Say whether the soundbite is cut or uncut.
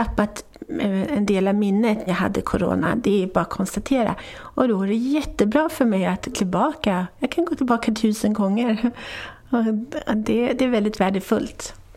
cut